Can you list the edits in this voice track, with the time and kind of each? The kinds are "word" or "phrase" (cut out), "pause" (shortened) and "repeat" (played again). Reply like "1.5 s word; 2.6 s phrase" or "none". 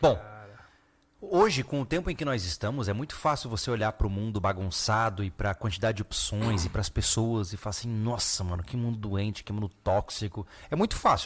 none